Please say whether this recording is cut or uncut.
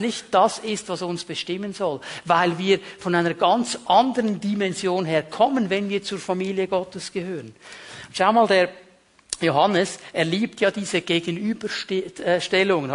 uncut